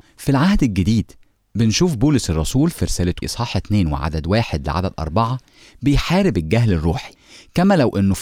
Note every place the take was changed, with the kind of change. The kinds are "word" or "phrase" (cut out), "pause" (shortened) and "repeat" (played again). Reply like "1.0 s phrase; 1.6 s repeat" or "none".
3.2 s word